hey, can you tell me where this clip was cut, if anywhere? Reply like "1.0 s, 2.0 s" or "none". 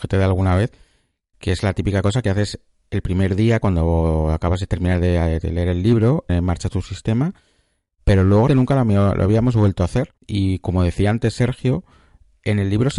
6.3 s, 8.5 s, 10.2 s